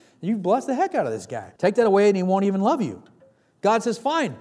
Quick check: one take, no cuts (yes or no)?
no